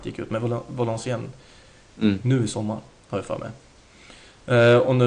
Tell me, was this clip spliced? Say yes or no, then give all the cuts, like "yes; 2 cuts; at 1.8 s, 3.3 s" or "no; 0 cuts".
no; 0 cuts